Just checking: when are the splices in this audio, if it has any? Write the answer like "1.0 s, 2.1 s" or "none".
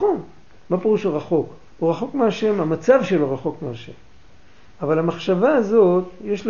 1.7 s